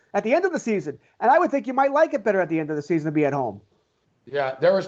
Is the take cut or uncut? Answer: uncut